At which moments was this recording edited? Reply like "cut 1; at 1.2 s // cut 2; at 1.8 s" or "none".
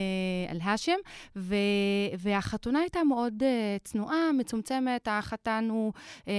none